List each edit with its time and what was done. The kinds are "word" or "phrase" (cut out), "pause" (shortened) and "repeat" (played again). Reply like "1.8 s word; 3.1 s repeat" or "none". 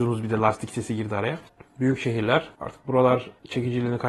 none